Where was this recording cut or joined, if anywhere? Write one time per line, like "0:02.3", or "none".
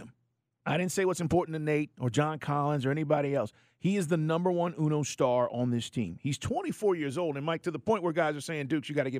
none